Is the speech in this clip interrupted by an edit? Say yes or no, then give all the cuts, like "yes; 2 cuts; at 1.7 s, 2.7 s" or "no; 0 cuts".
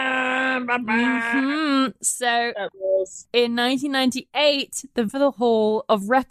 yes; 2 cuts; at 3.2 s, 5.1 s